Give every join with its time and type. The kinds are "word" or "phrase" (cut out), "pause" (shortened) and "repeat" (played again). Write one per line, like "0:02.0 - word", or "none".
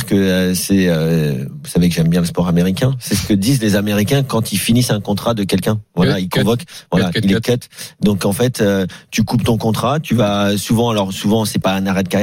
none